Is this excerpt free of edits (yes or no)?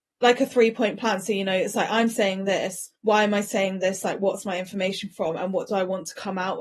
no